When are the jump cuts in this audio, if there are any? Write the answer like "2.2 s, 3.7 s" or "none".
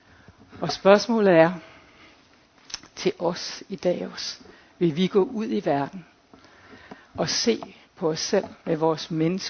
7.1 s, 7.8 s, 8.6 s